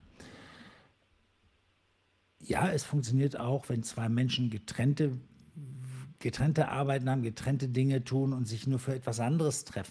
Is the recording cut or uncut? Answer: uncut